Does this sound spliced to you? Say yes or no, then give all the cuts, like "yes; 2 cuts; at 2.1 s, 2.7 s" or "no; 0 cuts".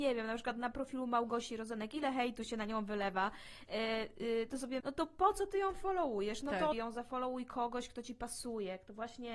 yes; 2 cuts; at 4.8 s, 6.7 s